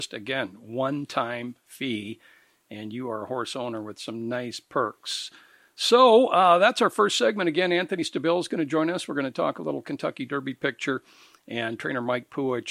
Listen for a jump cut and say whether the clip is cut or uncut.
uncut